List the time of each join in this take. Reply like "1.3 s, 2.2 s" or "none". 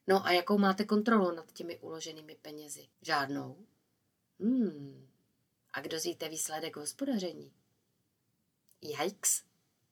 2.9 s, 5.9 s